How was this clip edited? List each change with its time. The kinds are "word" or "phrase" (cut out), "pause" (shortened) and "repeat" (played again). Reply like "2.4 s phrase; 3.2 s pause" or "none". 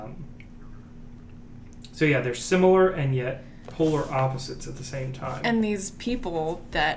none